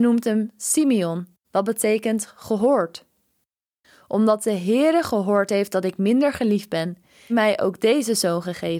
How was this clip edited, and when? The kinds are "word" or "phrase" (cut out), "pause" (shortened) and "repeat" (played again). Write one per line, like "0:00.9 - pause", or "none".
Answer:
0:01.4 - pause
0:07.3 - phrase